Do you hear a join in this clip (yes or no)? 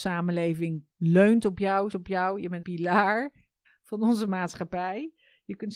yes